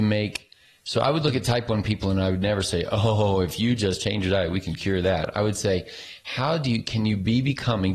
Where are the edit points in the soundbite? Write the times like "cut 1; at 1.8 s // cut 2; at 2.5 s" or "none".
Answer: none